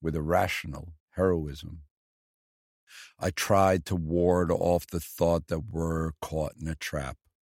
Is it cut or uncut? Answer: cut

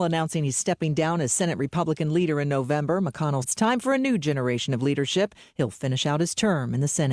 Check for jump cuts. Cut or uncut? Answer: cut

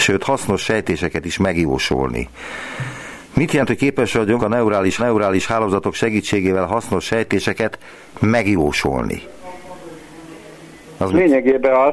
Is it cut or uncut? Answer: cut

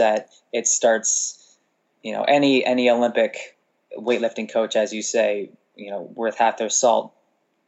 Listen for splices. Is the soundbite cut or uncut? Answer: uncut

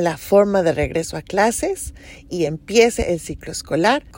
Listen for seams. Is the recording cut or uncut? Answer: uncut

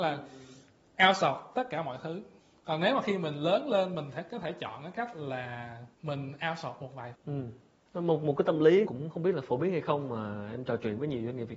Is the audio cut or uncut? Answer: cut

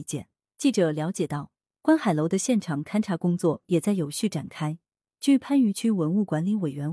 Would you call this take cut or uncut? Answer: uncut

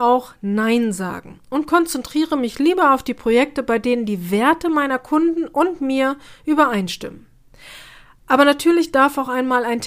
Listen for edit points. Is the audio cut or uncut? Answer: uncut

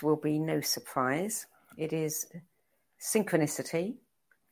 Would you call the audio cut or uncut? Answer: uncut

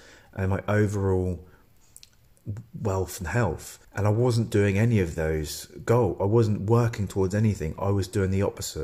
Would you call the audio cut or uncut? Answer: cut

